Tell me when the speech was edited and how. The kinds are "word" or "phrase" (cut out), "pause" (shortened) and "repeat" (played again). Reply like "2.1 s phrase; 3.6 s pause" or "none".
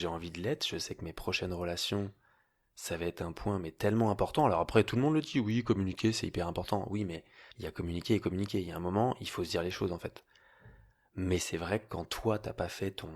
7.5 s pause